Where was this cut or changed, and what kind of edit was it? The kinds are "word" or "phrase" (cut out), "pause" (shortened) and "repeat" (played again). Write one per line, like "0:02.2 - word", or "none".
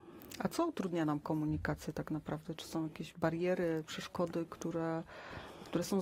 none